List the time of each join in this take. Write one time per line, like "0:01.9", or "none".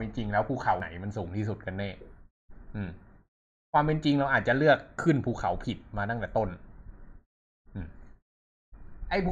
none